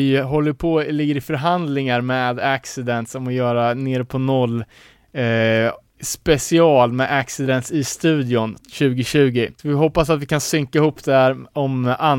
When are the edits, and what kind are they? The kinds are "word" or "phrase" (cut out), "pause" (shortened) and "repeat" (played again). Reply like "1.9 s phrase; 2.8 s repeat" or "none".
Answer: 9.6 s pause